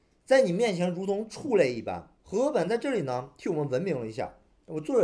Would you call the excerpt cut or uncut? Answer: cut